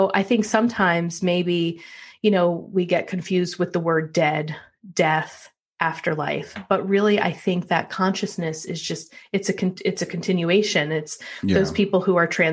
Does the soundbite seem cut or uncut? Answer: uncut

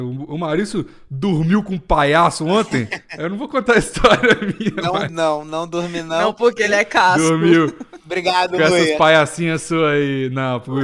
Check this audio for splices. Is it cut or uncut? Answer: cut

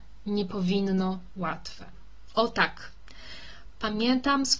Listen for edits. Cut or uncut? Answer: cut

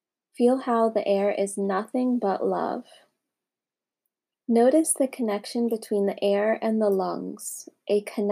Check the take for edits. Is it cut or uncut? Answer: cut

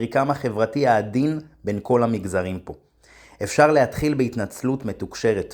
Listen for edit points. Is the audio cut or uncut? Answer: uncut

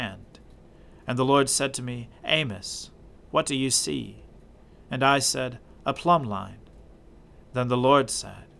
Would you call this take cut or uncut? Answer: uncut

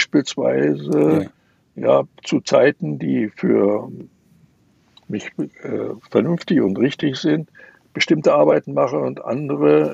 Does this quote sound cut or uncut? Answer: uncut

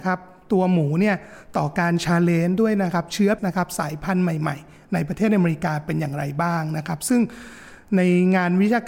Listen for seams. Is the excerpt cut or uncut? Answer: cut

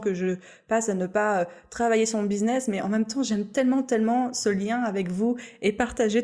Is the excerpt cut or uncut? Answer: uncut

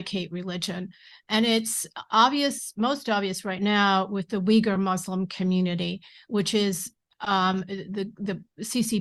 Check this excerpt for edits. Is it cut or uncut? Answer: uncut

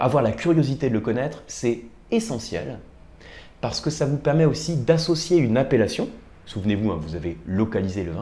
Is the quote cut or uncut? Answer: uncut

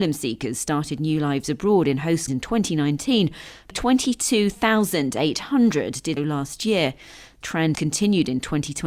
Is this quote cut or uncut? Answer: cut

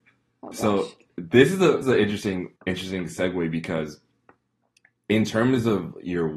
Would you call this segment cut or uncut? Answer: cut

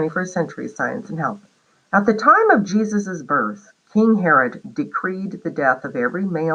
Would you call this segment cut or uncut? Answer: cut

